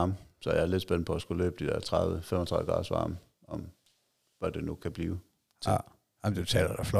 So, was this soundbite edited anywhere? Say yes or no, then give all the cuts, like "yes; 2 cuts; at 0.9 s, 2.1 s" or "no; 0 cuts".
no; 0 cuts